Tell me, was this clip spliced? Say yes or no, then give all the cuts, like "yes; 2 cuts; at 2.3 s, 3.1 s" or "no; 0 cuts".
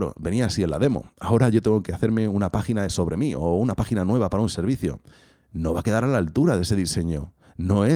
no; 0 cuts